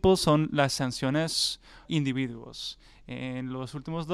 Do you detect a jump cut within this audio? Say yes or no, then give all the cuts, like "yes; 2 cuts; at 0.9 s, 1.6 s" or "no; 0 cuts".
yes; 1 cut; at 1.8 s